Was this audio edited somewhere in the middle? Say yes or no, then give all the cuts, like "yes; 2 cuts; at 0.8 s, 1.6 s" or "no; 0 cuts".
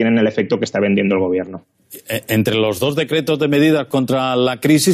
no; 0 cuts